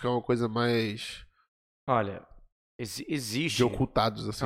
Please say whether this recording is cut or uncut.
uncut